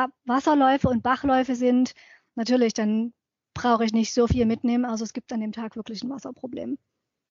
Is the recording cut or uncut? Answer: uncut